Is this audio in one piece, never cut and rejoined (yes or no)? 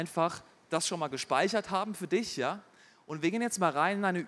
yes